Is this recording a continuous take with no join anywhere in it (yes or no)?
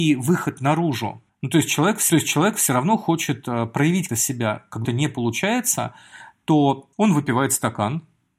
no